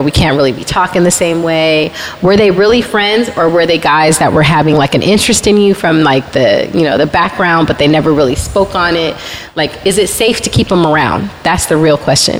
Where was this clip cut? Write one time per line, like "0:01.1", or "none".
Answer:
none